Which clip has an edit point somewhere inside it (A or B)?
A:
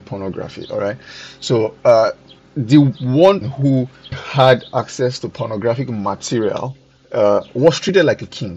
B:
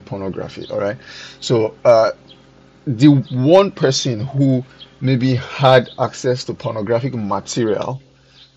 A